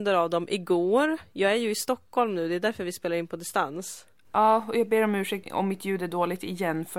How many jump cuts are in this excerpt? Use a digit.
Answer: 1